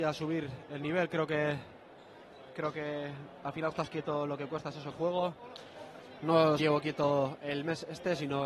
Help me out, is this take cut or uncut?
cut